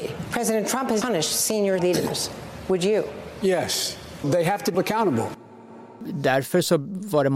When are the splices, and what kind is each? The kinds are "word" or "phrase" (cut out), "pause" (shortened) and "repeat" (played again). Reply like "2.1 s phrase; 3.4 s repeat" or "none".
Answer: 1.0 s word; 1.8 s word; 4.7 s word